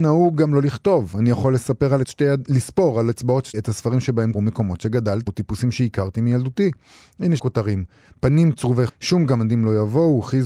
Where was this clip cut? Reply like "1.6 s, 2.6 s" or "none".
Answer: 2.0 s, 3.5 s, 4.3 s, 5.3 s, 7.4 s, 8.9 s